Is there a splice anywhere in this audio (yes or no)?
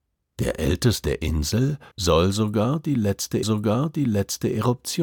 yes